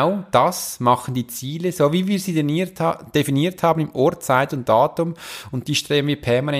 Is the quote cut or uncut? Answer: uncut